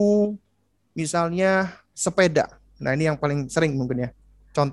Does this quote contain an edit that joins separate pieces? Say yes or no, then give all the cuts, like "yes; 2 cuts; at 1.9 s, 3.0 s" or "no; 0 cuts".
no; 0 cuts